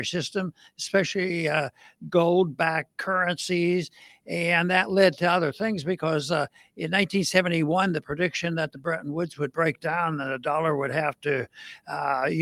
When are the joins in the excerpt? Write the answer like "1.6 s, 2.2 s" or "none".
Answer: none